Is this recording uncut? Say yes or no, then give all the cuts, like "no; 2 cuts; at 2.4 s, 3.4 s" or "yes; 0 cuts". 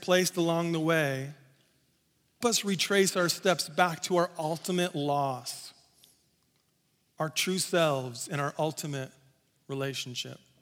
no; 1 cut; at 2.4 s